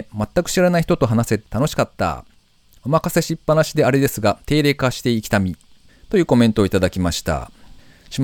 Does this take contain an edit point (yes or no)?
no